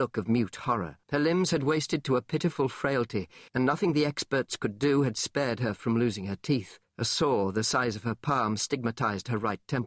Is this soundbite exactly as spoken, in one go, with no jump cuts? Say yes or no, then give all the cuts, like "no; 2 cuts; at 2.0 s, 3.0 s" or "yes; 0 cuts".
no; 3 cuts; at 1.0 s, 3.5 s, 6.9 s